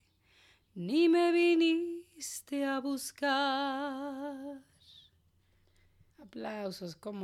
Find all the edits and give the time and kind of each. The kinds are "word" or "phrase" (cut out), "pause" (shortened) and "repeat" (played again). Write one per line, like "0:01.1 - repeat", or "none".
0:06.1 - pause

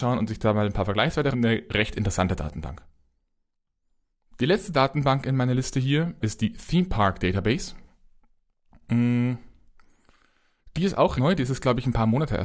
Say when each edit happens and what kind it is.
0:01.3 - word
0:06.2 - word
0:11.2 - word

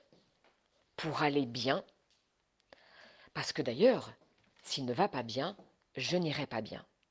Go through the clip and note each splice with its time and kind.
none

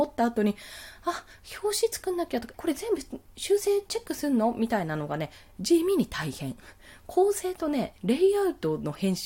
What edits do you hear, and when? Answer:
0:02.5 - word

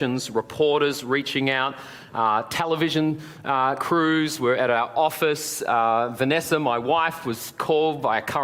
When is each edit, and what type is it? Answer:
none

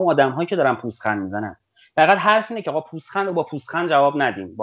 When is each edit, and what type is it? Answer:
none

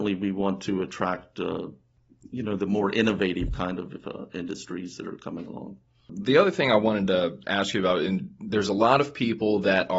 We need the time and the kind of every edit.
none

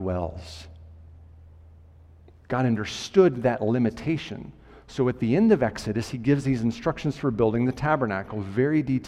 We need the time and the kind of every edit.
none

